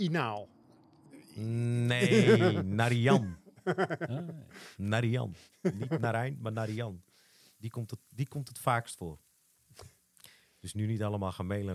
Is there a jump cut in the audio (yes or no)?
no